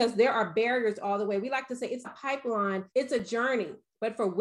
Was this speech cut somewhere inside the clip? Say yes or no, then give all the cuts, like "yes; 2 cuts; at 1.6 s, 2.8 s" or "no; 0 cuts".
yes; 2 cuts; at 2.0 s, 2.9 s